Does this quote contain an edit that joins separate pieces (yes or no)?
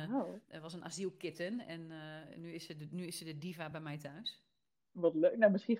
no